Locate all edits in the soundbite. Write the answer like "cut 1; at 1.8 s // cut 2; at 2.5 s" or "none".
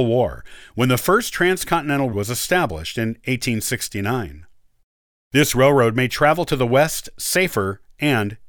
cut 1; at 2.1 s